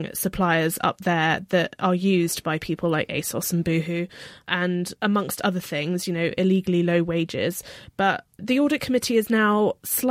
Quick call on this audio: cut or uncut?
cut